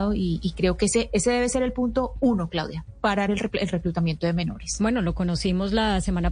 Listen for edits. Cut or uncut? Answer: uncut